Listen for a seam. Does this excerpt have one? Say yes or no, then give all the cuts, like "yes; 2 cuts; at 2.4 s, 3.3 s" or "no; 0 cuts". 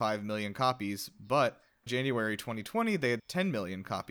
yes; 2 cuts; at 1.9 s, 3.2 s